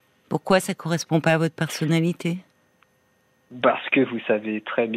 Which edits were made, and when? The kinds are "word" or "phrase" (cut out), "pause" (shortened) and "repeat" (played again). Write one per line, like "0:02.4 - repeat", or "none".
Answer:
none